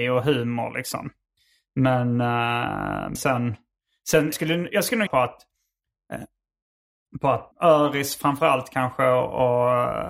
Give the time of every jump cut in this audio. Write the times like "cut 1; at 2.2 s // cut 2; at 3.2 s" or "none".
cut 1; at 3.1 s // cut 2; at 4.3 s // cut 3; at 5.1 s // cut 4; at 7.5 s